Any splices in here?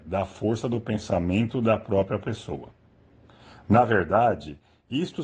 no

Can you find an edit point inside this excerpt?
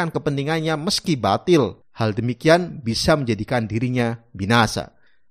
yes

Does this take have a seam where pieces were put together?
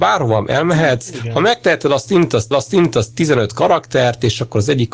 yes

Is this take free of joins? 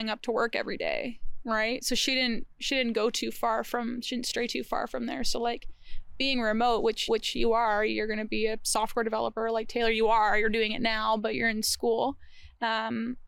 no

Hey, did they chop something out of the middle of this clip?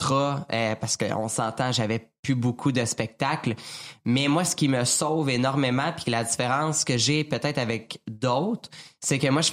no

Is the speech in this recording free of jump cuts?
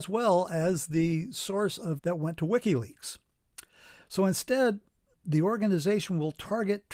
no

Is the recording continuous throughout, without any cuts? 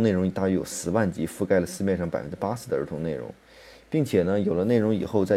yes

